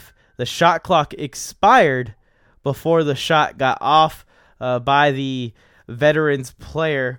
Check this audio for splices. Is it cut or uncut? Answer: uncut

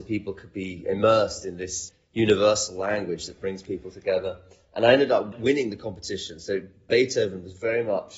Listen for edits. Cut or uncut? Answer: uncut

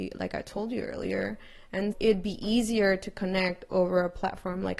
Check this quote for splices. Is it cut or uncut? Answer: cut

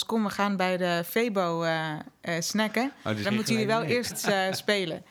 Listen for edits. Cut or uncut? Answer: cut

